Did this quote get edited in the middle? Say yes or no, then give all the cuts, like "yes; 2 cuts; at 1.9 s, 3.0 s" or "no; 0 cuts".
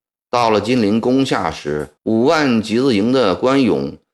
yes; 1 cut; at 2.0 s